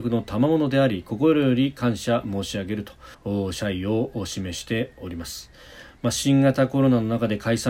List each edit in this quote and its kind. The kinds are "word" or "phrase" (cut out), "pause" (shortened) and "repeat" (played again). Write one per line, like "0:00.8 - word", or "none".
0:03.1 - pause